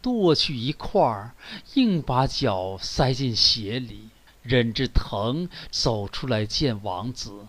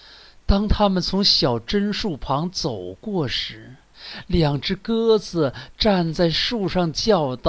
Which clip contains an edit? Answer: first; 1 cut; at 4.3 s

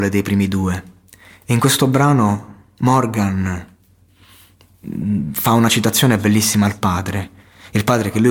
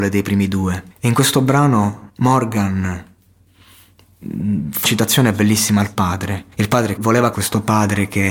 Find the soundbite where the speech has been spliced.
second; 6 cuts; at 0.9 s, 2.1 s, 4.8 s, 6.5 s, 7.0 s, 7.3 s

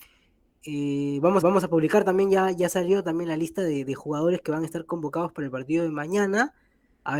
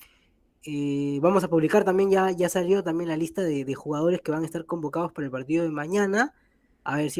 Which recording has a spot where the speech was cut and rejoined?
first; 1 cut; at 1.4 s

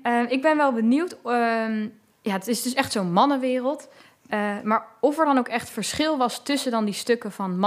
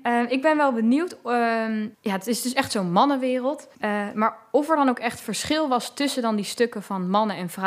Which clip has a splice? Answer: second; 2 cuts; at 1.9 s, 3.7 s

